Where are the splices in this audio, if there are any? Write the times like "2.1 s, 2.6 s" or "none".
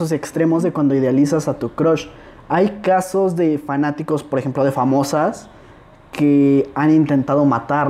none